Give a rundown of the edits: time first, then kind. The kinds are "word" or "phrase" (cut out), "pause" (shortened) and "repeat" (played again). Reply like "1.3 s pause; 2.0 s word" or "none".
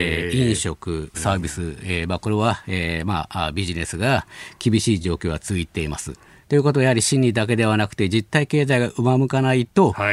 1.1 s phrase